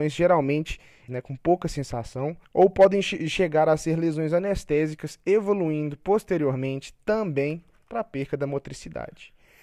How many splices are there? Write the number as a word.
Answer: two